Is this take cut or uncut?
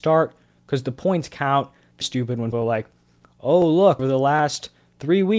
cut